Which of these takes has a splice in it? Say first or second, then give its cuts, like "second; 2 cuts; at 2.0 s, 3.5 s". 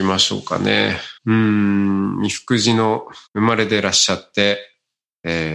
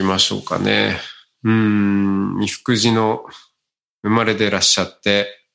first; 2 cuts; at 1.2 s, 3.3 s